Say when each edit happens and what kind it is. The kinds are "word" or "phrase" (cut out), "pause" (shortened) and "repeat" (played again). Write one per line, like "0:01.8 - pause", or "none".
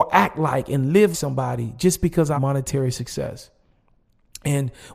0:01.1 - word
0:02.4 - word

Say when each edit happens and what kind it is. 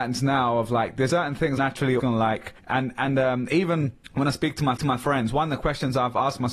0:01.1 - word
0:01.6 - word
0:02.0 - word
0:02.6 - pause
0:04.0 - pause
0:04.8 - repeat

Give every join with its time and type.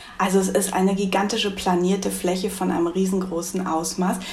none

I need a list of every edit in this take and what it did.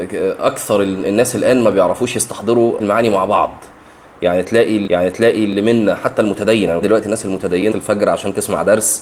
0:02.8 - word
0:04.9 - repeat
0:06.8 - word
0:07.7 - phrase

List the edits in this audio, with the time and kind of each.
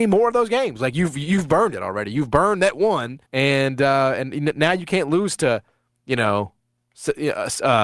0:03.3 - pause

